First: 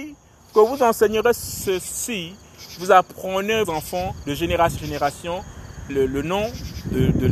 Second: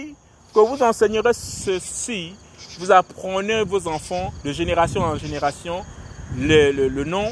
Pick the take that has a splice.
first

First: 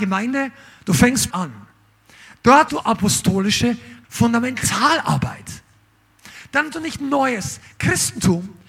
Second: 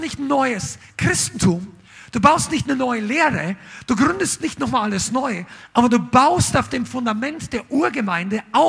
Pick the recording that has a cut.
first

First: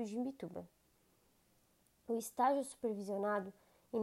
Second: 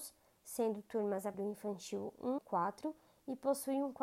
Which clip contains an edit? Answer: second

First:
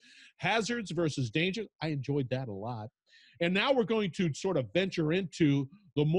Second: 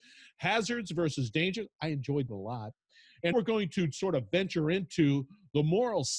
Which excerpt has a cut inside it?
second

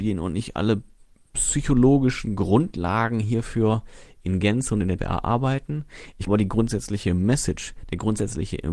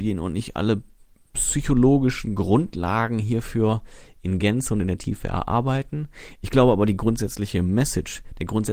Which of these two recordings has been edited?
first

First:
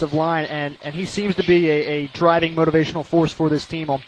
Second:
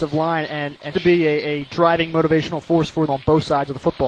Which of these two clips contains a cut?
second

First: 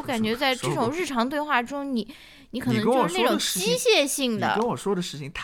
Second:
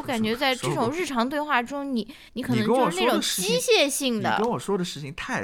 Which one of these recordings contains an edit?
second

